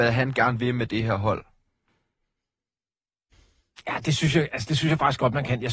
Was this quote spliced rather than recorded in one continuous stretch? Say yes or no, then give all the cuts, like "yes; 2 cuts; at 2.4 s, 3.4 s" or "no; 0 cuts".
no; 0 cuts